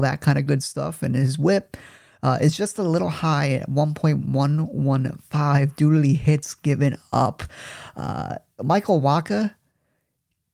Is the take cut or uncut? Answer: uncut